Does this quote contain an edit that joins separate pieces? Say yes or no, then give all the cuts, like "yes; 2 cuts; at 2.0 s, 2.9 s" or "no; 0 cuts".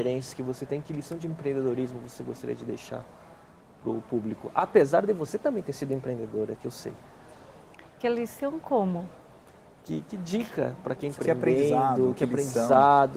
yes; 2 cuts; at 10.1 s, 11.2 s